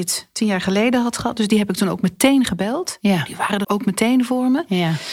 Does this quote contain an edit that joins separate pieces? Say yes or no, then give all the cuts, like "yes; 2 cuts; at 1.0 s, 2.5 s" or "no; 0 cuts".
yes; 1 cut; at 3.6 s